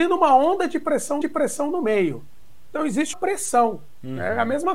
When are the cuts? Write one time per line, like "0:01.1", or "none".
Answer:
0:01.2
0:03.1